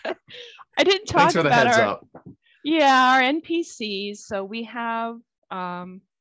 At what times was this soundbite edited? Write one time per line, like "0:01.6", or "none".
none

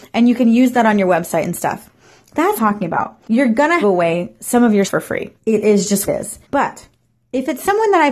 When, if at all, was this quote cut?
0:02.6
0:03.2
0:03.8
0:04.9
0:05.4
0:06.1
0:06.4

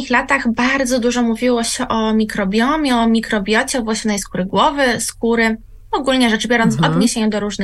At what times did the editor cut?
none

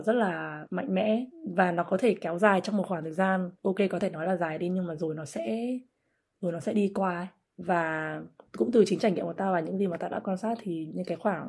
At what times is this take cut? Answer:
none

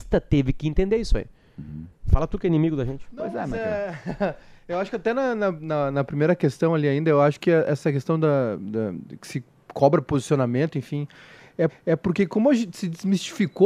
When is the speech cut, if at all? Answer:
0:02.0
0:11.7
0:12.7

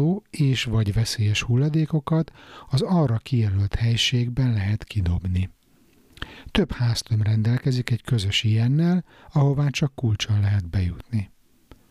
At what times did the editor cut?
none

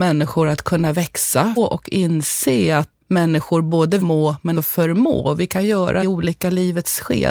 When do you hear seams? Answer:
0:01.6
0:03.0
0:04.0
0:04.6
0:06.0

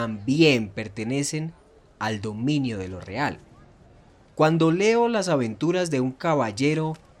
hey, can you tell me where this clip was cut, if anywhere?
none

